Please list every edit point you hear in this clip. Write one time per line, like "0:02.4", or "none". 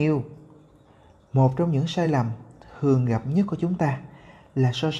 none